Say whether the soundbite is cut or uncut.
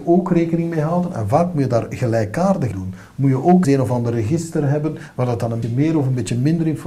cut